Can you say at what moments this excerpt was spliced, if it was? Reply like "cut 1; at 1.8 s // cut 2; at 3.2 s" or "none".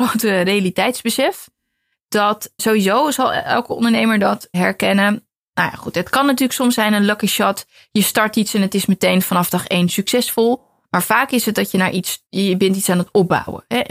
cut 1; at 2.6 s // cut 2; at 4.5 s // cut 3; at 12.3 s